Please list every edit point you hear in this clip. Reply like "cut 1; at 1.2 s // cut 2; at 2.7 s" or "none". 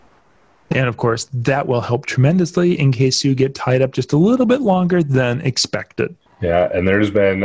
cut 1; at 6.3 s